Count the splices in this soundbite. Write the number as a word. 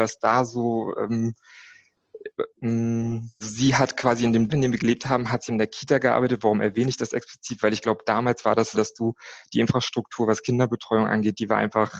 five